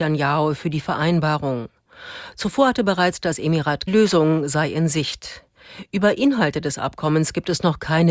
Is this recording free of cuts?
no; 1 cut; at 3.9 s

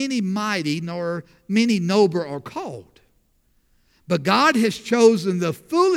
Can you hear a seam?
no; 0 cuts

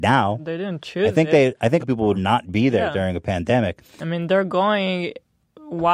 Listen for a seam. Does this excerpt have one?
yes; 2 cuts; at 1.8 s, 2.1 s

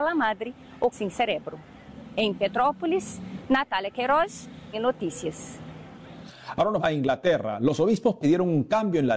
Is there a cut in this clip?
yes; 3 cuts; at 0.9 s, 4.7 s, 6.8 s

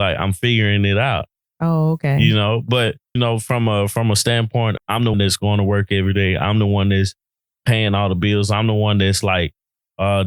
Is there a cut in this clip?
yes; 3 cuts; at 3.2 s, 4.8 s, 5.1 s

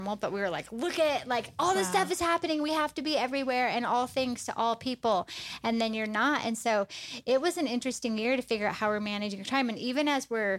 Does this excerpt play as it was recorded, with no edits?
yes; 0 cuts

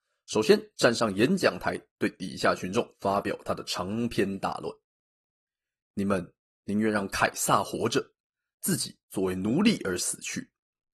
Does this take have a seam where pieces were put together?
no; 0 cuts

